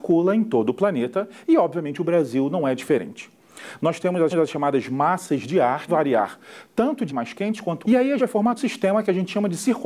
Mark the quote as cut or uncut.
cut